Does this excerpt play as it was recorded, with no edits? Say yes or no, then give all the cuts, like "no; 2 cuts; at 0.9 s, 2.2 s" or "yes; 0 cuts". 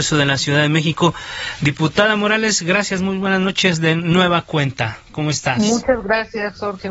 yes; 0 cuts